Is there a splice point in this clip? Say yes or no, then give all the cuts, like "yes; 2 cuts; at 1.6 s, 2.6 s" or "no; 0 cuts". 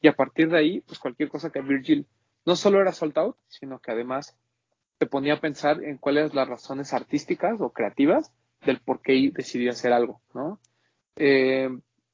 yes; 1 cut; at 1.5 s